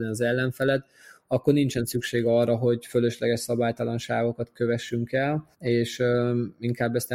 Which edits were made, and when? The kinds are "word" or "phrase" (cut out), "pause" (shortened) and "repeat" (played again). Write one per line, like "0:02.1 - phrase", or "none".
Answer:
0:05.5 - pause